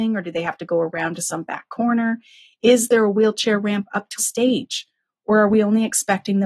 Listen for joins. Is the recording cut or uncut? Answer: cut